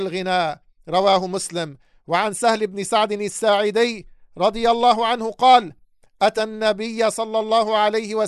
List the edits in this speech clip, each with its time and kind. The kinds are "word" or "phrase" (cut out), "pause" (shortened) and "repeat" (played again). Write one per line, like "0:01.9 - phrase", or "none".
none